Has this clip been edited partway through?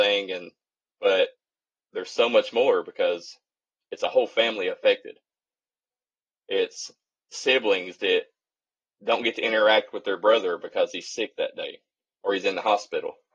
no; 0 cuts

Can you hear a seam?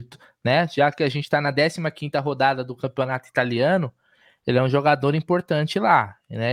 no; 0 cuts

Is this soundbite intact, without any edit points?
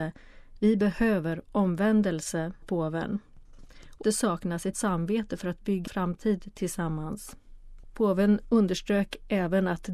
no; 4 cuts; at 2.6 s, 4.0 s, 4.7 s, 5.9 s

